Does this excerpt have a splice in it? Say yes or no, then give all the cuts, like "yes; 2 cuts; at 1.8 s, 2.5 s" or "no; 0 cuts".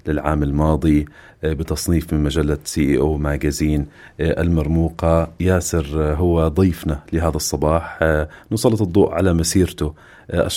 no; 0 cuts